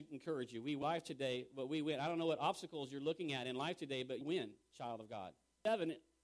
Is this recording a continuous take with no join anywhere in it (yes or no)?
no